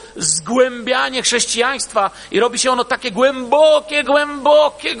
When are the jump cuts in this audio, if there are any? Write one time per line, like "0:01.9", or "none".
0:04.0